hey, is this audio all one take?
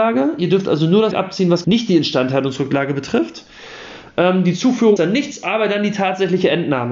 no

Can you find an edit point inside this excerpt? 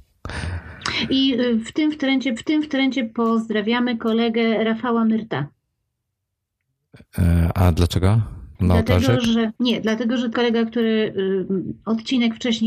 yes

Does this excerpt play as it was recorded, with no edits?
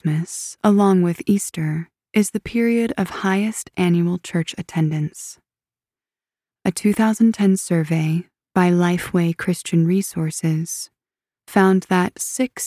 yes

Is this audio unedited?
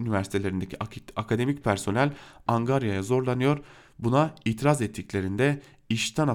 yes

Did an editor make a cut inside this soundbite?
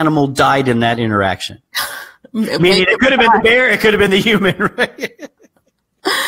no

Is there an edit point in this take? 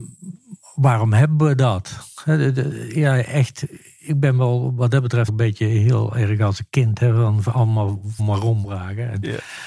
yes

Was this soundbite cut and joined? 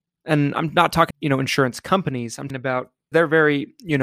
yes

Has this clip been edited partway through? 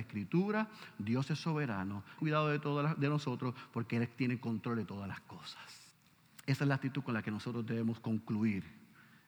yes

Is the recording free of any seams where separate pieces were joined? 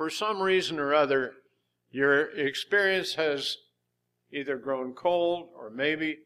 yes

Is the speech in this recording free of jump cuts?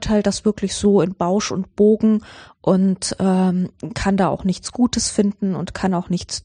yes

